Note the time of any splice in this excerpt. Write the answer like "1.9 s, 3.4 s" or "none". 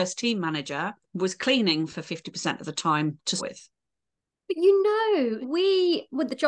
1.0 s, 3.4 s, 5.4 s